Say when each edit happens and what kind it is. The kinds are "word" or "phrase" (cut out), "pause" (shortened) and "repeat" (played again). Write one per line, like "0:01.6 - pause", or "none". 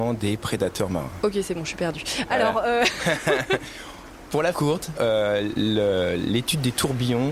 0:04.5 - word
0:05.0 - word